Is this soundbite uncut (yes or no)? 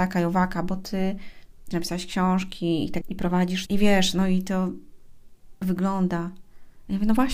no